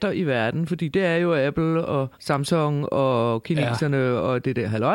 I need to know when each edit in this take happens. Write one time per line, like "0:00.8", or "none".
0:02.1